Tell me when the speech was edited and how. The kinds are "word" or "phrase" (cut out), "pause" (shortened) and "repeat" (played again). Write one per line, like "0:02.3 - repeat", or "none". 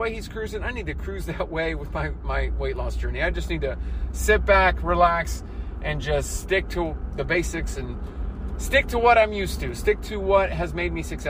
none